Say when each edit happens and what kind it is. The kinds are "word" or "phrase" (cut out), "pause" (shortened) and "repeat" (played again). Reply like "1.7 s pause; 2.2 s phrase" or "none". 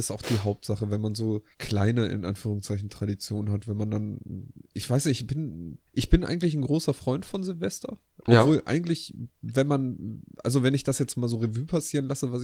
1.5 s pause; 5.9 s pause